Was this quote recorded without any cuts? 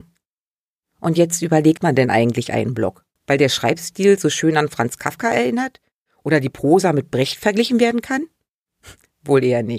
no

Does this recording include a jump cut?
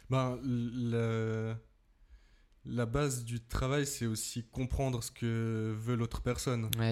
no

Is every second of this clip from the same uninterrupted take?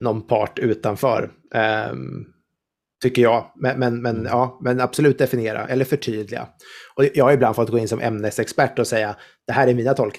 yes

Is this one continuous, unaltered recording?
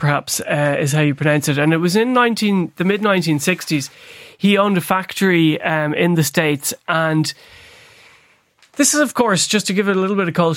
yes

